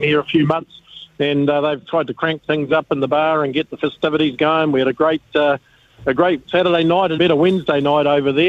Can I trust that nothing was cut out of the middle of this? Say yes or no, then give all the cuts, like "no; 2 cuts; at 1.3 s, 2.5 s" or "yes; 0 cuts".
no; 1 cut; at 7.2 s